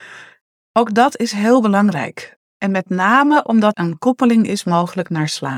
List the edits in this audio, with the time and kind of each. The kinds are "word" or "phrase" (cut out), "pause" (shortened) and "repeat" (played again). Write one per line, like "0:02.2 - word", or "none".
0:03.7 - word